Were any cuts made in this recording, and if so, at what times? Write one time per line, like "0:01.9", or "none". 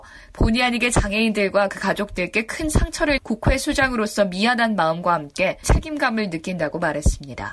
0:03.2
0:05.6

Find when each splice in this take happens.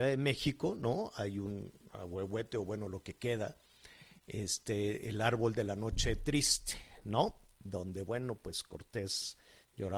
none

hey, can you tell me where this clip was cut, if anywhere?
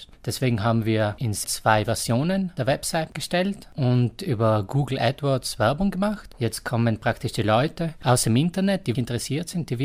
0:01.4
0:08.9

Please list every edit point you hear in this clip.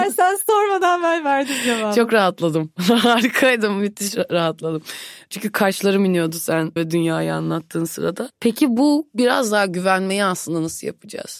0:06.8

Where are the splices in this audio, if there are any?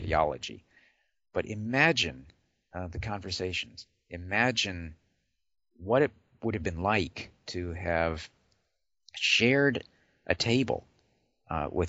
none

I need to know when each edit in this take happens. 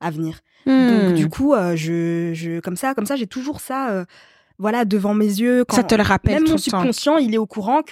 none

